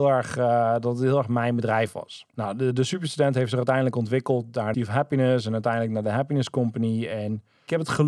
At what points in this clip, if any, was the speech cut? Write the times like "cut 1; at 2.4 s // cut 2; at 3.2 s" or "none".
cut 1; at 2.3 s // cut 2; at 4.7 s